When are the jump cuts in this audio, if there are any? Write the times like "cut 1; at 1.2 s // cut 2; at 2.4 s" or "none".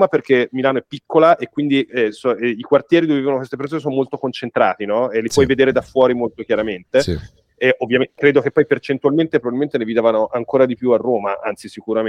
none